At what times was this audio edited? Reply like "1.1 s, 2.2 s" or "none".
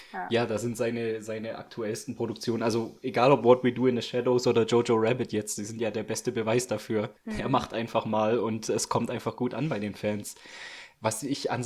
7.2 s